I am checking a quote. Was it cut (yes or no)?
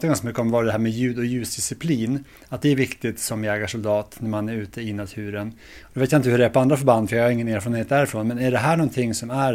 no